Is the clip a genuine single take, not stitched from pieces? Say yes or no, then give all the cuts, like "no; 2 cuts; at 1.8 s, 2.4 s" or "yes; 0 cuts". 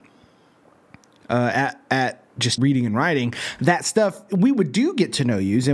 no; 1 cut; at 2.6 s